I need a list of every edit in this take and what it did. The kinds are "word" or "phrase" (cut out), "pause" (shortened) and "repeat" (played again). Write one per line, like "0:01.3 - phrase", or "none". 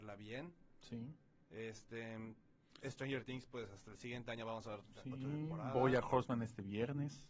none